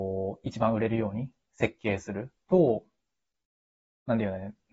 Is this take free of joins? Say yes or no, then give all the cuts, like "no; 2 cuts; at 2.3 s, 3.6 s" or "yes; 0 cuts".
yes; 0 cuts